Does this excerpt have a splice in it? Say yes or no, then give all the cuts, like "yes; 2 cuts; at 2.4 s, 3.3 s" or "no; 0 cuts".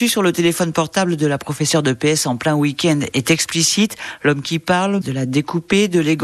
yes; 1 cut; at 5.0 s